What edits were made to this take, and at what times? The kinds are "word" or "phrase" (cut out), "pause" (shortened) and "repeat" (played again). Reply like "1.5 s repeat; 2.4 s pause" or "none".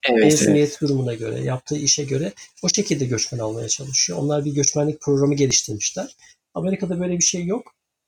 none